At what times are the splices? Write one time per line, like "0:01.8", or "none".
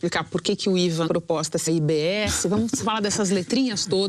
0:01.1
0:01.7